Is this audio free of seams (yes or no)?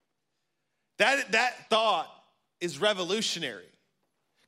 no